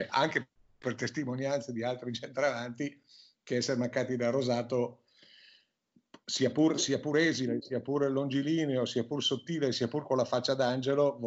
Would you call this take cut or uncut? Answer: uncut